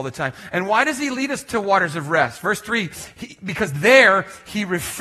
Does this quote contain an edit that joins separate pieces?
no; 0 cuts

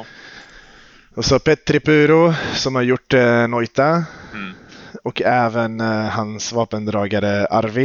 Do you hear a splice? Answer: no; 0 cuts

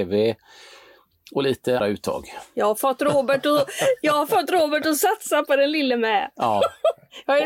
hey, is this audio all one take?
no; 1 cut; at 1.8 s

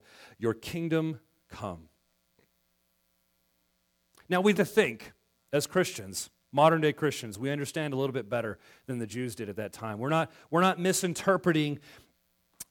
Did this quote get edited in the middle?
yes; 1 cut; at 4.5 s

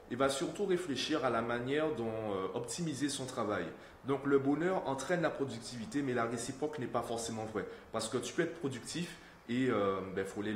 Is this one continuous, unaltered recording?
yes; 0 cuts

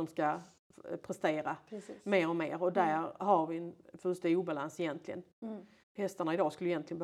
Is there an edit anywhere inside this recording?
yes; 1 cut; at 5.8 s

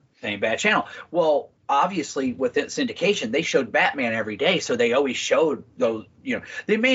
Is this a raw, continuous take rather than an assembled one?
no; 1 cut; at 1.6 s

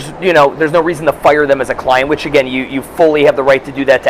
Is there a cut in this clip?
no; 0 cuts

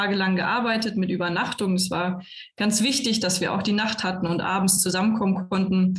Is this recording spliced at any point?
no; 0 cuts

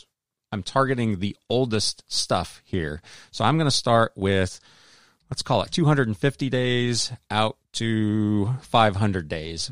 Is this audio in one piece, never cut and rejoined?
yes; 0 cuts

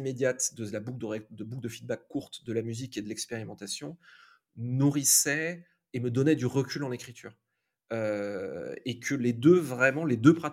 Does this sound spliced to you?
no; 0 cuts

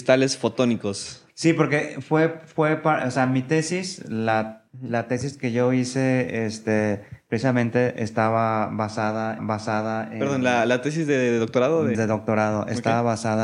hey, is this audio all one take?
no; 3 cuts; at 1.3 s, 9.4 s, 11.9 s

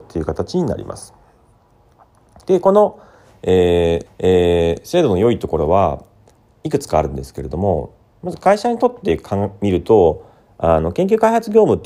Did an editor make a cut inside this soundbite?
yes; 1 cut; at 4.1 s

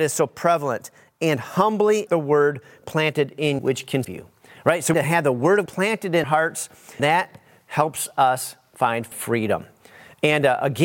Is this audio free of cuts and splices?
no; 8 cuts; at 2.1 s, 3.6 s, 4.0 s, 4.9 s, 5.7 s, 6.2 s, 7.0 s, 9.1 s

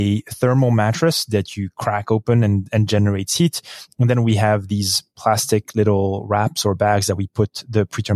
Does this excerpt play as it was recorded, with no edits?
yes; 0 cuts

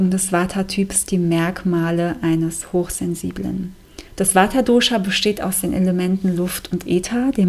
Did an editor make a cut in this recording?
yes; 1 cut; at 4.1 s

